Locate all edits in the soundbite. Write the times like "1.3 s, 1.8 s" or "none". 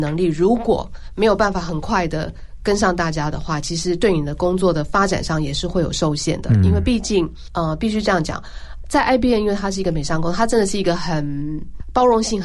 none